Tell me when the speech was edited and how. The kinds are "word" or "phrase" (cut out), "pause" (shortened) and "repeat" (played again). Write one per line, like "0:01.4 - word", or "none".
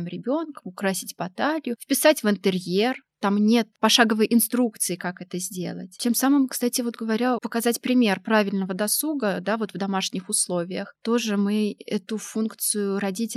0:07.4 - word